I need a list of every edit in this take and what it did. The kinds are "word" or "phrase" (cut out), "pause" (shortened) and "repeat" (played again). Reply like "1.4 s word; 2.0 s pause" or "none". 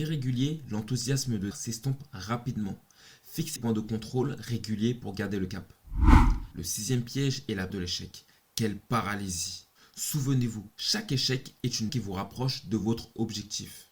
1.5 s word; 3.6 s word; 7.7 s word; 11.9 s word